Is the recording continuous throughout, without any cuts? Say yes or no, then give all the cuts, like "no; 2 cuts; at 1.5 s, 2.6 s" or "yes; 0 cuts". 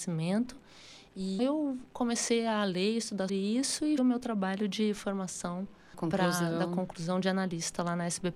no; 4 cuts; at 1.4 s, 3.3 s, 4.0 s, 5.9 s